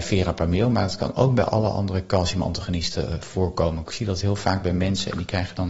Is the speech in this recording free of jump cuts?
yes; 0 cuts

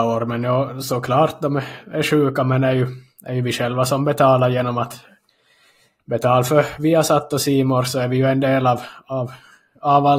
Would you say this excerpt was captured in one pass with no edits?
yes; 0 cuts

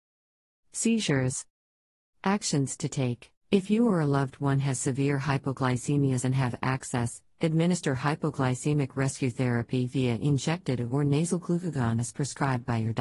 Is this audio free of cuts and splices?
no; 2 cuts; at 3.4 s, 6.2 s

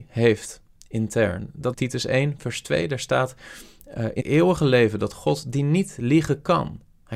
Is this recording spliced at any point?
yes; 2 cuts; at 1.7 s, 4.2 s

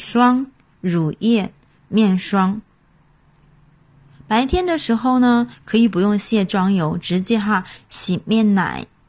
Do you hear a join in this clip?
no; 0 cuts

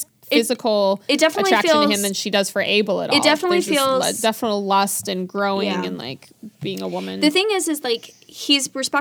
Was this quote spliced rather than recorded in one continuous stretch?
no; 0 cuts

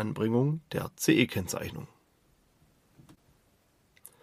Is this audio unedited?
yes; 0 cuts

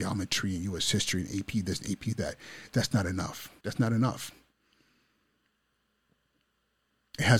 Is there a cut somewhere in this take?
yes; 1 cut; at 3.6 s

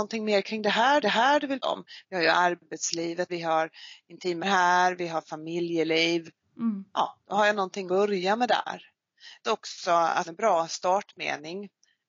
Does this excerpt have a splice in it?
yes; 8 cuts; at 1.0 s, 1.6 s, 3.3 s, 4.4 s, 7.2 s, 7.9 s, 9.4 s, 10.2 s

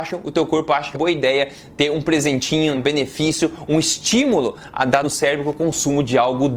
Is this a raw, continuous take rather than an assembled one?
no; 3 cuts; at 0.9 s, 2.7 s, 5.0 s

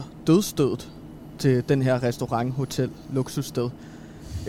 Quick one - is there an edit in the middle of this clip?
no; 0 cuts

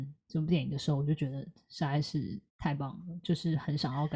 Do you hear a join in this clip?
yes; 1 cut; at 2.5 s

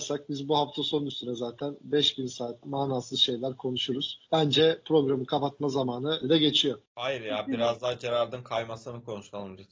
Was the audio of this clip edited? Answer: yes; 4 cuts; at 2.6 s, 4.3 s, 6.2 s, 6.9 s

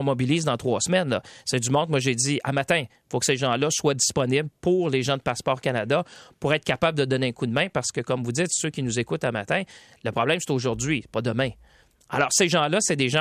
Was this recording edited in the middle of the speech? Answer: no; 0 cuts

